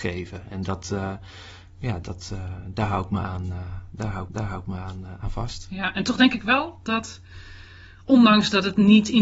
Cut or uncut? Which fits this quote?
cut